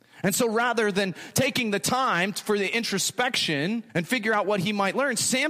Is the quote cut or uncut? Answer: cut